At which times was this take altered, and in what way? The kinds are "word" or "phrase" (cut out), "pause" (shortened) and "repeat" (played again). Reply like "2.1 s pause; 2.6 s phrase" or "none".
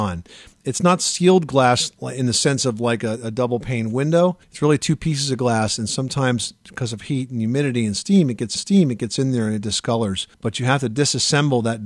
4.4 s pause; 8.6 s repeat; 10.3 s pause